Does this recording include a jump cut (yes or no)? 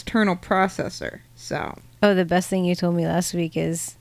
yes